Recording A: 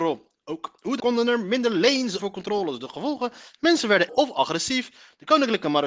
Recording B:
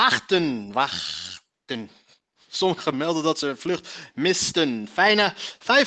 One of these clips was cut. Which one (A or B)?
A